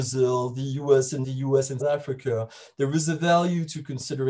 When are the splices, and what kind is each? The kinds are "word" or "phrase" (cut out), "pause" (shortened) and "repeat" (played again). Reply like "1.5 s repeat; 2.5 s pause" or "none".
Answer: 1.2 s word; 1.8 s word